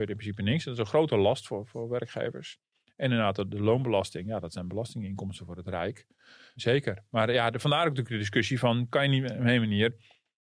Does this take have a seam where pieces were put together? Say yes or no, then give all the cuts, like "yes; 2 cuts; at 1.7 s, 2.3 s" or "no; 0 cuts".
no; 0 cuts